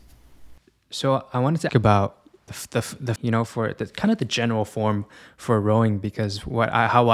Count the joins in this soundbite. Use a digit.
3